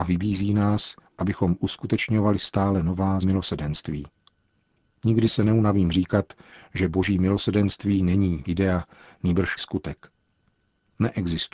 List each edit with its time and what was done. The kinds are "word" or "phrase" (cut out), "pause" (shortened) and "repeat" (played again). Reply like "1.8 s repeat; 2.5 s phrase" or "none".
3.2 s word; 8.4 s word; 9.6 s word

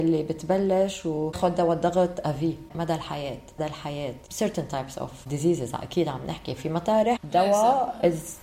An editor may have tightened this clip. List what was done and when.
3.6 s phrase

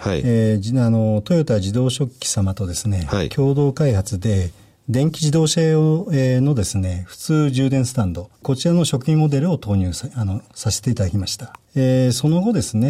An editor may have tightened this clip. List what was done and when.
8.4 s pause; 11.6 s pause

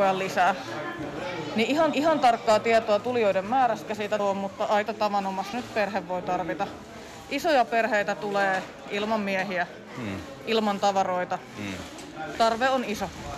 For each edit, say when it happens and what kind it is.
1.9 s repeat; 3.9 s word; 4.2 s phrase; 4.9 s word; 5.5 s word

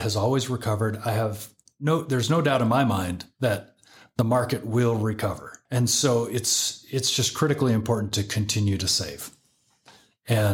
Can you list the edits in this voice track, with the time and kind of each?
none

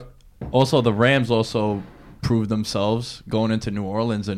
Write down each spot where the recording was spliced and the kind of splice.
none

